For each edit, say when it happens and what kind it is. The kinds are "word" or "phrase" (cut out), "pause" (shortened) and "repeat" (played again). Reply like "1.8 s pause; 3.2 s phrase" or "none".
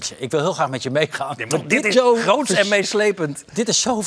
1.5 s word; 1.9 s word